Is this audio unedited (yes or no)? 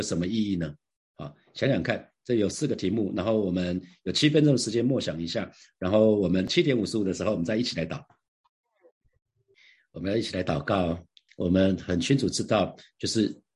yes